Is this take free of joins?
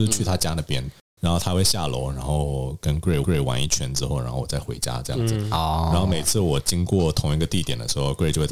no; 1 cut; at 3.2 s

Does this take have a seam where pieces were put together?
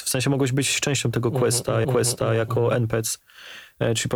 yes; 1 cut; at 1.8 s

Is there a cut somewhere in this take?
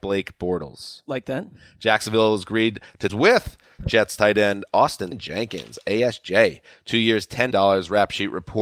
yes; 4 cuts; at 3.1 s, 3.8 s, 5.1 s, 7.5 s

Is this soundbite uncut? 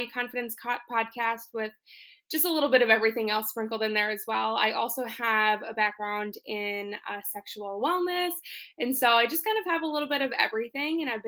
yes; 0 cuts

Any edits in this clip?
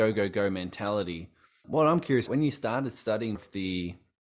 yes; 3 cuts; at 1.6 s, 2.3 s, 3.4 s

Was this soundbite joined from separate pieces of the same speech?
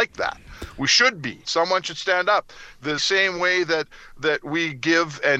yes; 2 cuts; at 1.4 s, 3.0 s

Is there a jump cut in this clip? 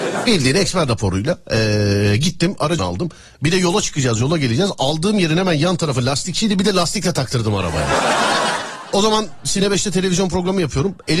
yes; 1 cut; at 2.8 s

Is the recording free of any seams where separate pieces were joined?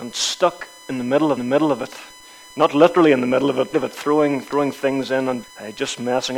no; 3 cuts; at 1.4 s, 3.7 s, 5.4 s

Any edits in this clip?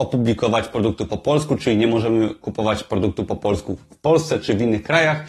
no; 0 cuts

